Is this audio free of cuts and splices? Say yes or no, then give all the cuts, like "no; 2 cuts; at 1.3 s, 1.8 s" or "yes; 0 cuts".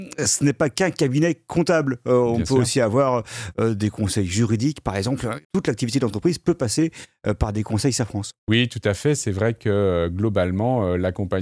no; 2 cuts; at 5.4 s, 8.4 s